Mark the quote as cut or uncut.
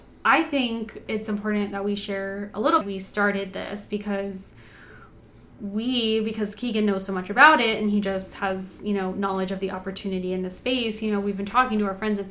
cut